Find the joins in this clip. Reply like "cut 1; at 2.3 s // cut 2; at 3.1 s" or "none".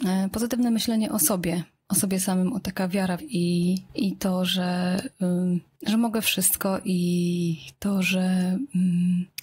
cut 1; at 3.2 s